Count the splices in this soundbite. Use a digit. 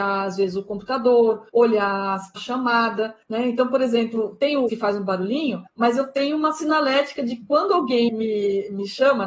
6